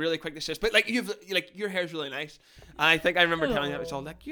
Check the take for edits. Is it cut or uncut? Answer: uncut